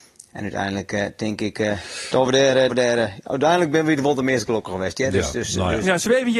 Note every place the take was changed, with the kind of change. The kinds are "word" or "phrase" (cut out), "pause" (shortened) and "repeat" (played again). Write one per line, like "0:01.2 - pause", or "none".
0:02.7 - word